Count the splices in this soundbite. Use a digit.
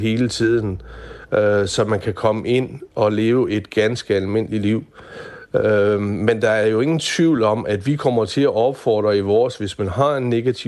0